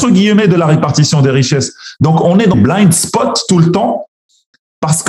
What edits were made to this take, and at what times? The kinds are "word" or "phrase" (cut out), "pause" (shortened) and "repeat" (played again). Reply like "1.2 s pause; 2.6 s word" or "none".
2.5 s word

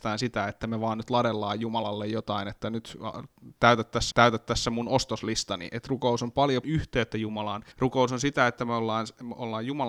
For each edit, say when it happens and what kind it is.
4.1 s repeat; 6.6 s phrase; 7.7 s pause

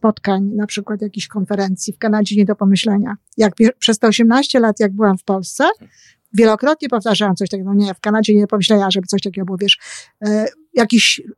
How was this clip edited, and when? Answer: none

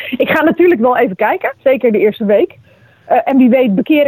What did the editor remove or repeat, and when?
1.6 s pause

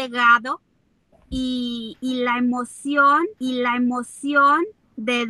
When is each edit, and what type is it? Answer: 3.4 s repeat

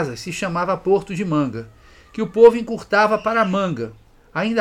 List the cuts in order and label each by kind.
none

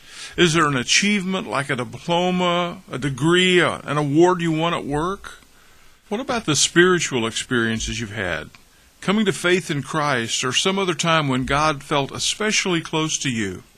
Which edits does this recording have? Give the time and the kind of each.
none

